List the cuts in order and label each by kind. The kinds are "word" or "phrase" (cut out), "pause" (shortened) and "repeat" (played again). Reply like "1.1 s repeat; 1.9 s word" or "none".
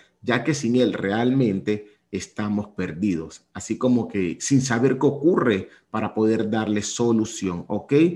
none